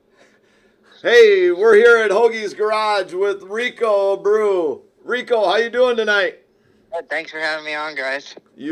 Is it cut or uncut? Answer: uncut